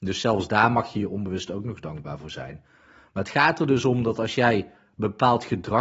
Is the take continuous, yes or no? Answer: yes